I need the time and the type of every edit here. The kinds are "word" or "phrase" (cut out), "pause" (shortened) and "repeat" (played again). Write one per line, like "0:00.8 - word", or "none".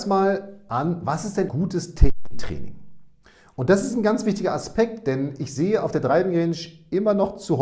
0:01.5 - word